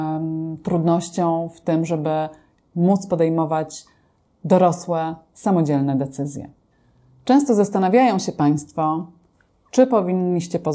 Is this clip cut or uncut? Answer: uncut